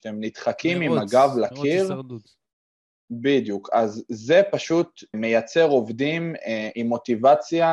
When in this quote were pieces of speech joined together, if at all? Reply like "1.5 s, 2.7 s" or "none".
5.1 s